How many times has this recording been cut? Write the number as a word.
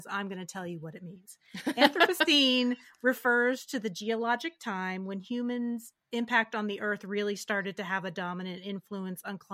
one